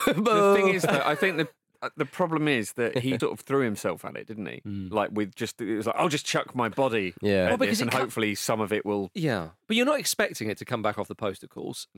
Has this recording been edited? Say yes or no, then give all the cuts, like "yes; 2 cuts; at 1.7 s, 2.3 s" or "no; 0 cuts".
yes; 1 cut; at 3.2 s